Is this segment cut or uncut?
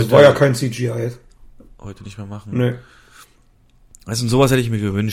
uncut